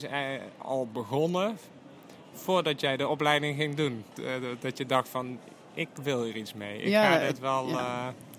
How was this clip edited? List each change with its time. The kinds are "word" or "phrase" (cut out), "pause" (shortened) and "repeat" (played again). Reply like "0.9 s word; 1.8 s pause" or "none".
none